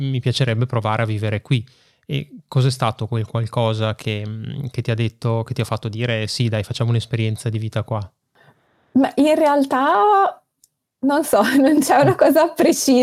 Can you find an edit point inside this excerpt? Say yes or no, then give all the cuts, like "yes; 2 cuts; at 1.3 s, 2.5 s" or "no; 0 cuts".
no; 0 cuts